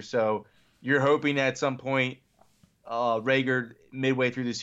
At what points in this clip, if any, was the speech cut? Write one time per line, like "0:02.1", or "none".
none